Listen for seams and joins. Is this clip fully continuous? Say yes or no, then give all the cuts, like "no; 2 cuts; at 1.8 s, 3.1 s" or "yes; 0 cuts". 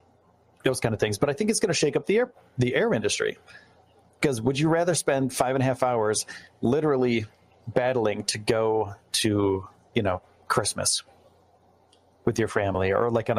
yes; 0 cuts